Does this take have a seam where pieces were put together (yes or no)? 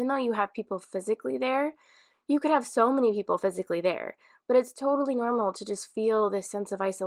no